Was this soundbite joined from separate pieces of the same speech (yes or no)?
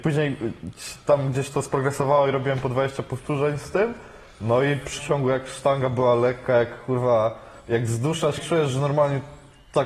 yes